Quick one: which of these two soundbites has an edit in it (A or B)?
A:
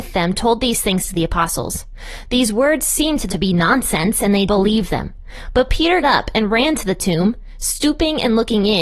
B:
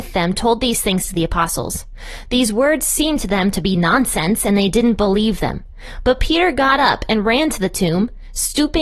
A